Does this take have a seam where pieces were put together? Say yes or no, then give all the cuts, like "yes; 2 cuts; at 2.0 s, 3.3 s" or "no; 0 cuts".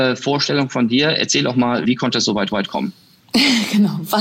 yes; 2 cuts; at 1.8 s, 2.5 s